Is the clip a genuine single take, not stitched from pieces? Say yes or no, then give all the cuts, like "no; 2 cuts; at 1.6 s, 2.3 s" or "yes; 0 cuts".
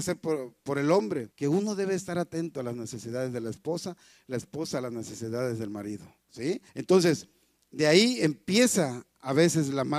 no; 2 cuts; at 1.3 s, 6.7 s